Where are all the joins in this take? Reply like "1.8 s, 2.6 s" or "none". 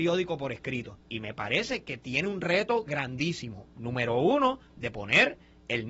1.0 s, 3.7 s